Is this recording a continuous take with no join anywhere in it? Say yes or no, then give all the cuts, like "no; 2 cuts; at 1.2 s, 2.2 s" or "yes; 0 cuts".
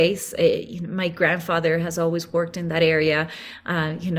yes; 0 cuts